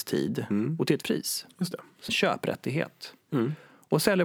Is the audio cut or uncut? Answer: cut